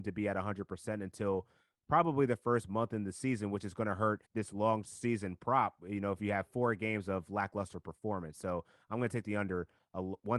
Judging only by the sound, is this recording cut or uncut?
cut